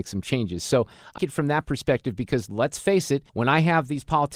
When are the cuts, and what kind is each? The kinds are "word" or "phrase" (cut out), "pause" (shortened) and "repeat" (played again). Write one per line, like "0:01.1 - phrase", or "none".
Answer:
0:01.2 - word
0:03.3 - pause